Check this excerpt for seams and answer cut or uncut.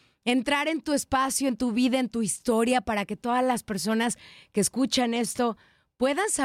uncut